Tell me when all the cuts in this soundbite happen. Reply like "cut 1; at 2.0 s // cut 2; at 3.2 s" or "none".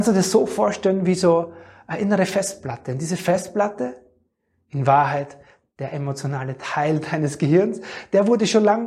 none